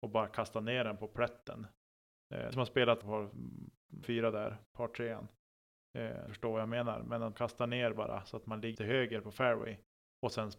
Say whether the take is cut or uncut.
cut